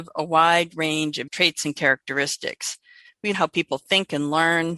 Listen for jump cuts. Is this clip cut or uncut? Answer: cut